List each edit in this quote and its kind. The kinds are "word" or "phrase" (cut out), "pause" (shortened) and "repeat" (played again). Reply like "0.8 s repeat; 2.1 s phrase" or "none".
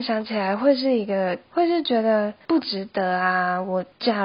1.5 s pause

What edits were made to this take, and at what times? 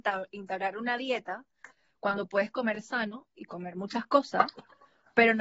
none

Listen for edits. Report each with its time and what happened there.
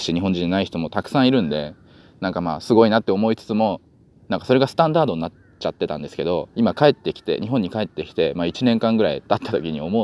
6.5 s pause

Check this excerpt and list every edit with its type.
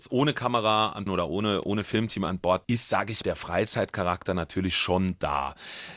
1.1 s phrase; 2.6 s word; 3.2 s word

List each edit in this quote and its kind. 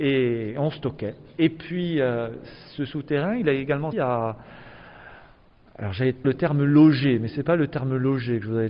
3.9 s word; 6.2 s word

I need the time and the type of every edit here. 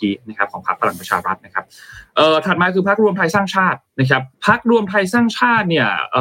4.3 s pause

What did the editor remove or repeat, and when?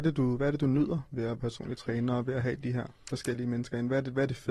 1.4 s word

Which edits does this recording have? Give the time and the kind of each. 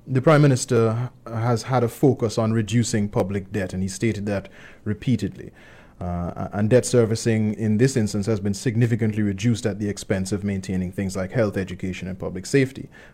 7.6 s word

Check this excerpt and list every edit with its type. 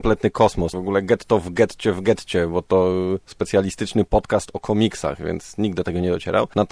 none

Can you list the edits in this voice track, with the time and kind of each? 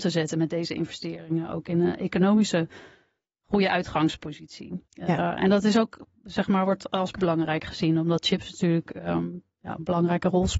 4.9 s pause; 7.1 s word

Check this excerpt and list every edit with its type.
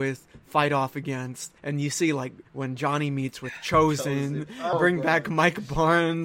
1.6 s pause; 2.5 s pause; 4.7 s word

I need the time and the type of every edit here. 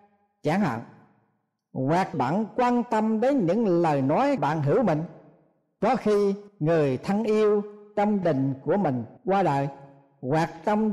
2.1 s phrase; 4.4 s word; 6.5 s pause; 8.2 s word; 9.2 s pause

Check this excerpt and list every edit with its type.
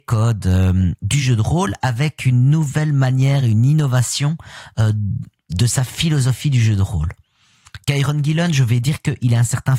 none

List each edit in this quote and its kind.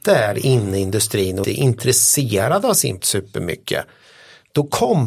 1.4 s word; 3.0 s word

